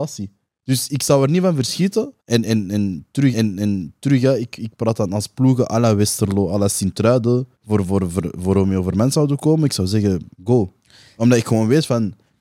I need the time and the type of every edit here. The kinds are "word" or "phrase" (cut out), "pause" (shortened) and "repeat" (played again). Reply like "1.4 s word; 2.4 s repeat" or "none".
2.2 s pause; 3.3 s repeat; 7.6 s pause; 10.3 s pause